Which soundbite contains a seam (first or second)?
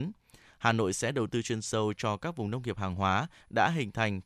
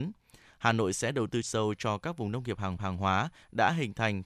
second